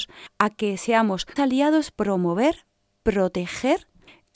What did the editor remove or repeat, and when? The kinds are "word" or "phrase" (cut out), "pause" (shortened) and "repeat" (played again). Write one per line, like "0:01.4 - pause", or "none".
0:01.4 - word
0:01.9 - word